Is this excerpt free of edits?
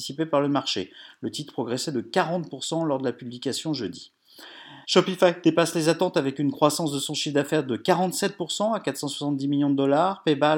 no; 1 cut; at 4.8 s

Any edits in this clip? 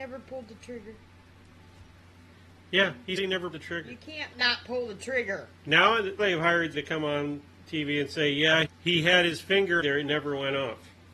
yes; 7 cuts; at 3.2 s, 3.5 s, 4.3 s, 6.2 s, 6.7 s, 8.6 s, 9.8 s

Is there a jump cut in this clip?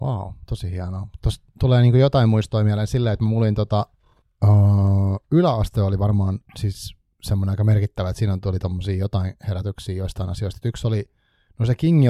yes; 1 cut; at 4.2 s

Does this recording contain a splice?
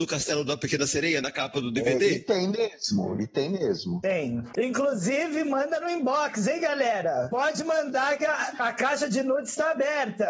no; 0 cuts

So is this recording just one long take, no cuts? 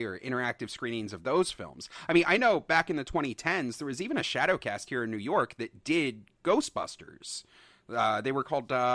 yes; 0 cuts

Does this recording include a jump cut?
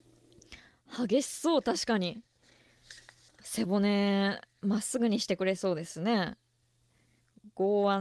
yes; 1 cut; at 3.3 s

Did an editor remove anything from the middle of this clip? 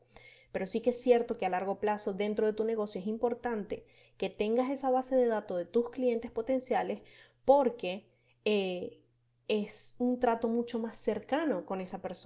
no; 0 cuts

